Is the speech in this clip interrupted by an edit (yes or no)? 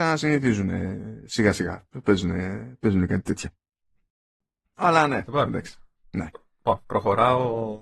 no